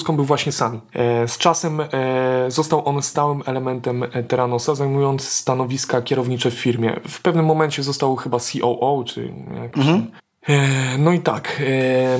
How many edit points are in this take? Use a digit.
0